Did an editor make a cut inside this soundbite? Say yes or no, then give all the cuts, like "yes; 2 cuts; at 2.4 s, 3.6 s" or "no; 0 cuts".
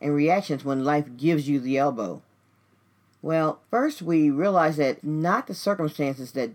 yes; 2 cuts; at 3.6 s, 5.0 s